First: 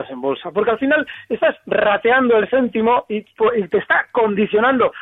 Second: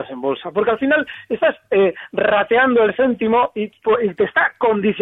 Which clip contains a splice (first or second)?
first